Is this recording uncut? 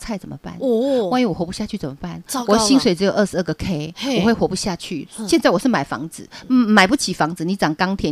yes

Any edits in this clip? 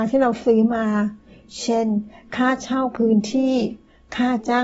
no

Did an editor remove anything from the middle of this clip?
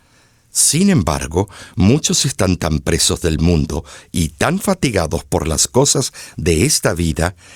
no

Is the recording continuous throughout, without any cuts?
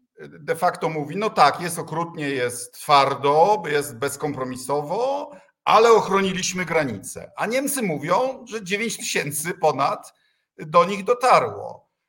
yes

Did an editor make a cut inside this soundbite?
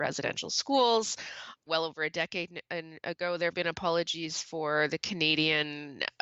yes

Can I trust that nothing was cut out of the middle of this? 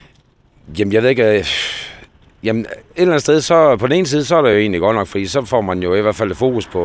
yes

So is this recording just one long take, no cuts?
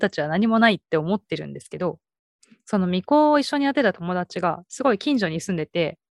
yes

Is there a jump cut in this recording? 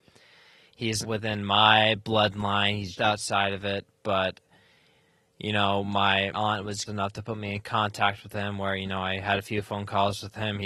yes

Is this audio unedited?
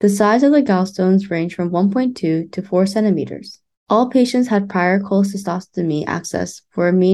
no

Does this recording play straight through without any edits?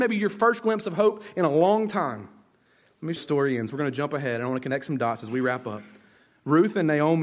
no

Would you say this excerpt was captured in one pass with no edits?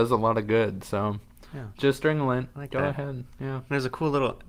no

